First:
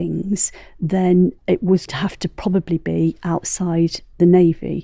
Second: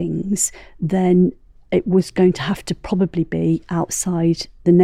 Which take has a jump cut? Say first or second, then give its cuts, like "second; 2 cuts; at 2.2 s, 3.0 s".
first; 2 cuts; at 1.4 s, 1.9 s